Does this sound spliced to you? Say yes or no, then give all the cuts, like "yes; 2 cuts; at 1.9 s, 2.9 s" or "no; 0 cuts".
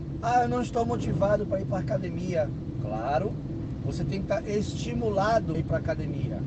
yes; 1 cut; at 5.5 s